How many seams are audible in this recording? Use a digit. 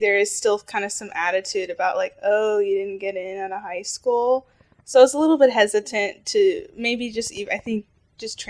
0